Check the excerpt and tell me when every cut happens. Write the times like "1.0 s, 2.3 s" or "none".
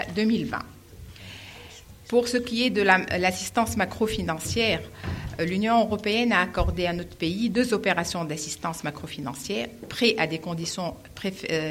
none

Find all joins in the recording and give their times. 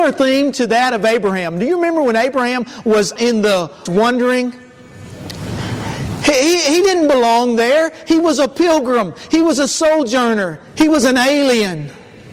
3.2 s, 3.9 s, 10.7 s

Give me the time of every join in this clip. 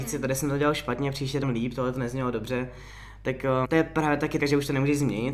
1.4 s, 3.6 s, 4.4 s

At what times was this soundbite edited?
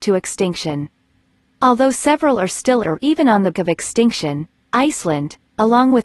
2.8 s, 3.5 s

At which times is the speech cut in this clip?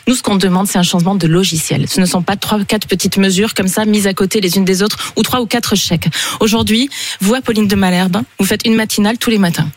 none

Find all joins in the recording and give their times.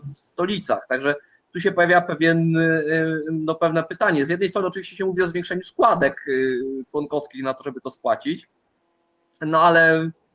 none

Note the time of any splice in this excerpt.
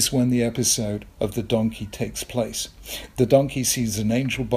1.1 s

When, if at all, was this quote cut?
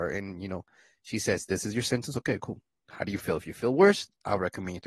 none

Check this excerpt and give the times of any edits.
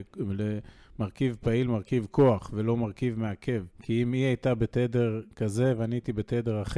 3.7 s

